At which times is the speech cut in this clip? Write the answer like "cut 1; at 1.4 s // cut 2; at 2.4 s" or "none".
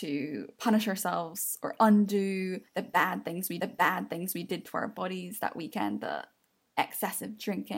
cut 1; at 2.7 s // cut 2; at 3.6 s